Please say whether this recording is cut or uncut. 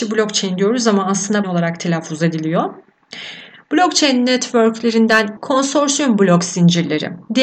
cut